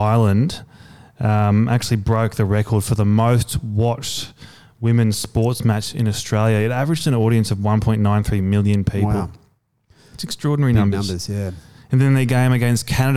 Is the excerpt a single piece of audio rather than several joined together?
yes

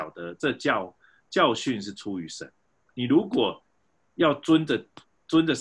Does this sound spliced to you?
no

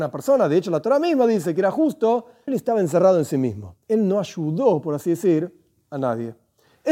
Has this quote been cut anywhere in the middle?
yes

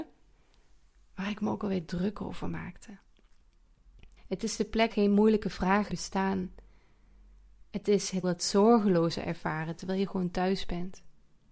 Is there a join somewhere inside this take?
yes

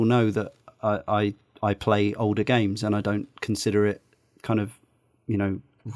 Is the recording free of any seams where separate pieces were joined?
yes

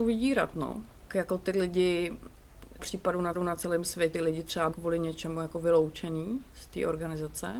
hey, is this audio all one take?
no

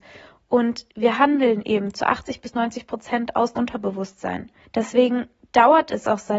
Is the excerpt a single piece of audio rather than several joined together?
no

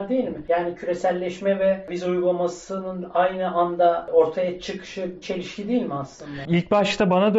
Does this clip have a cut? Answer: yes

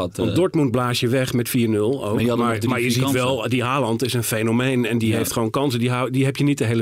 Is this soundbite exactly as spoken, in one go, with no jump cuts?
yes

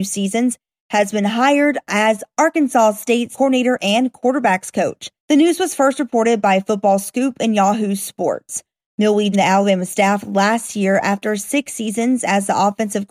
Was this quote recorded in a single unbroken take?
no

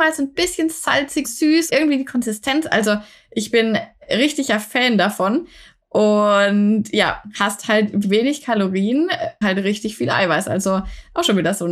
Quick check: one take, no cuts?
no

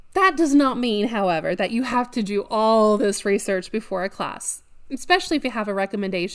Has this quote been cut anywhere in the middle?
no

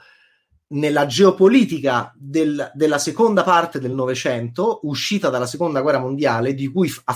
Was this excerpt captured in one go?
yes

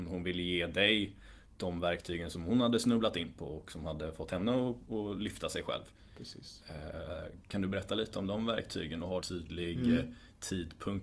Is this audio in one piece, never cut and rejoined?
no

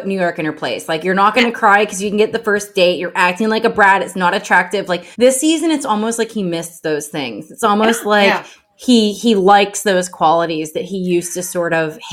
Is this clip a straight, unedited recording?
no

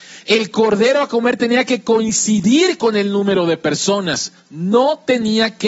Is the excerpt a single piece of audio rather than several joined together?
no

